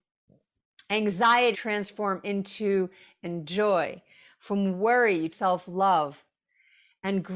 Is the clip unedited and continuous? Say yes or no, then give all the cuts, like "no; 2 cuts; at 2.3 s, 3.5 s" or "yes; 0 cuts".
no; 3 cuts; at 1.5 s, 3.2 s, 5.3 s